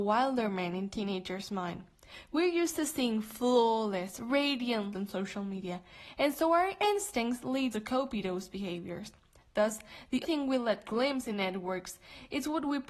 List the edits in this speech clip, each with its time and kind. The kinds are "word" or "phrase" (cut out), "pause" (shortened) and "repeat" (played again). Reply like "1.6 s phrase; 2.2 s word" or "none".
4.9 s word; 7.7 s word; 10.2 s word; 11.3 s word